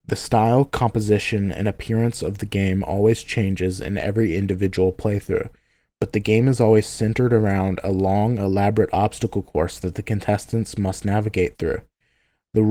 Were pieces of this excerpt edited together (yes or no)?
no